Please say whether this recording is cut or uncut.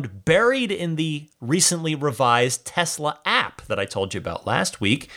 uncut